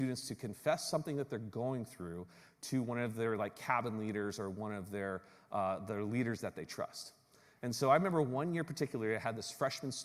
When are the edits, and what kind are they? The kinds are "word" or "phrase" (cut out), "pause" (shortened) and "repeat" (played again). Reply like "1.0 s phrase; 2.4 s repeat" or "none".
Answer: none